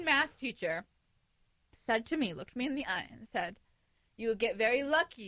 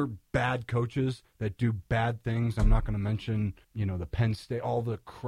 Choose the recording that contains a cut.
second; 1 cut; at 3.6 s

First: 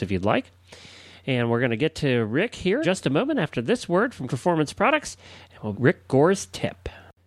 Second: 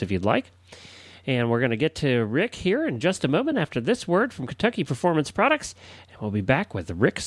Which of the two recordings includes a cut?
first; 3 cuts; at 2.8 s, 4.3 s, 5.7 s

